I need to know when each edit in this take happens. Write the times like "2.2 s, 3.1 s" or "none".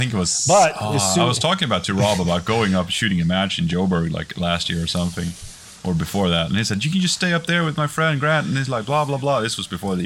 none